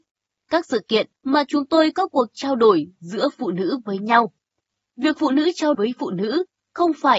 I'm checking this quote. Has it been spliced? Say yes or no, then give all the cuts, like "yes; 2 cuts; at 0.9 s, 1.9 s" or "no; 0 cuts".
yes; 3 cuts; at 1.1 s, 1.9 s, 5.7 s